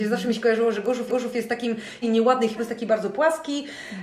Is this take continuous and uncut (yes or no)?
no